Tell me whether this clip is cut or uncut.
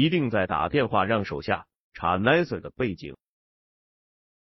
uncut